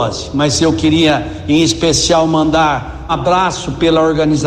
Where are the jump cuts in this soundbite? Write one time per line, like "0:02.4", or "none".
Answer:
0:03.1